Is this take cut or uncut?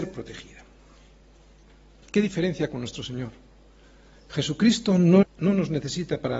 cut